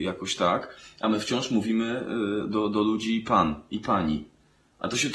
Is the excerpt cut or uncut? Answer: uncut